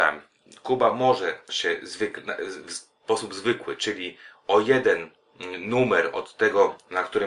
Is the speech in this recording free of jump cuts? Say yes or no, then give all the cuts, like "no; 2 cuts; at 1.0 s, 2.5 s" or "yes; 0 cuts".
no; 1 cut; at 1.5 s